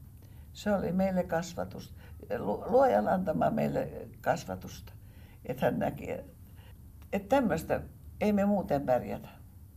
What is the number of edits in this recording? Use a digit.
0